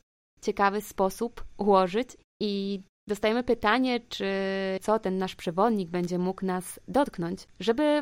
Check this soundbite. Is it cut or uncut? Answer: cut